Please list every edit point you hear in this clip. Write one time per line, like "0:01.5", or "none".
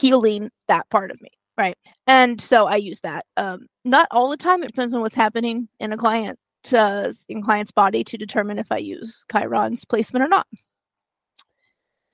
0:01.9
0:04.7